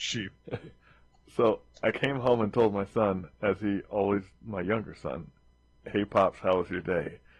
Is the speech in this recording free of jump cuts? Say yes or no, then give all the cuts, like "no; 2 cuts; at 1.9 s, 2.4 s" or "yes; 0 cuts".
yes; 0 cuts